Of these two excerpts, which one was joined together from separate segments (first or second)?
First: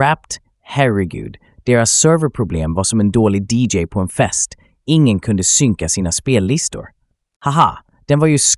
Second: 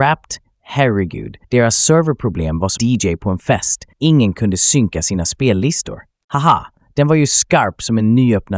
second